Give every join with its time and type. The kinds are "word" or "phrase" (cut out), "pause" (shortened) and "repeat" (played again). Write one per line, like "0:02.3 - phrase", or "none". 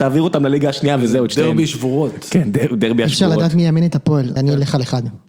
0:04.4 - word

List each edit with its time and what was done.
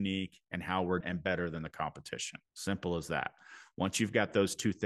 0:01.0 - word
0:02.5 - pause

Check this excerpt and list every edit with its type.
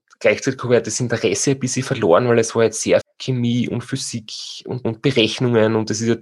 0:03.0 - word
0:04.8 - word

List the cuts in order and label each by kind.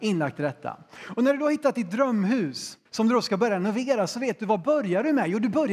0:02.9 - pause

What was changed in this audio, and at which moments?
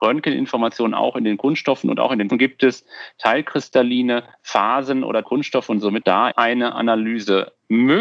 0:02.3 - word
0:04.3 - pause
0:05.2 - word
0:06.0 - word
0:06.3 - word

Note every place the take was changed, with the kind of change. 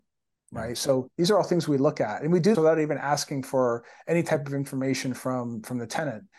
0:02.5 - word

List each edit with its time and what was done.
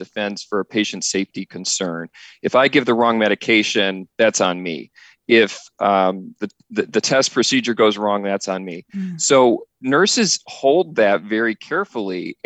0:04.1 - pause

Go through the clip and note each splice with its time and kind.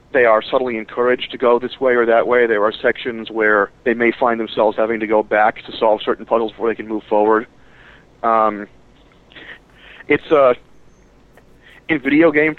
0:03.8 - pause

